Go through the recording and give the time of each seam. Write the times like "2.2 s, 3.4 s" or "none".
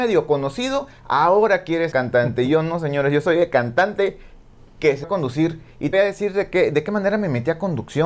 1.9 s, 5.0 s, 5.9 s